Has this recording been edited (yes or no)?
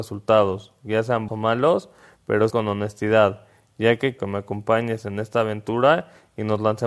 yes